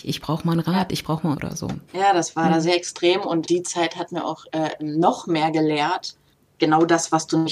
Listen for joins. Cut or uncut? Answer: cut